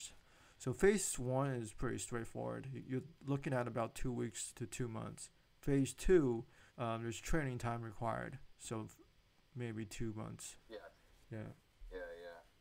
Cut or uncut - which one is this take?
cut